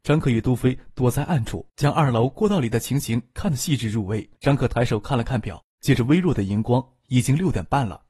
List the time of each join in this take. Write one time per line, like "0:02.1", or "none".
0:01.7
0:04.4
0:05.7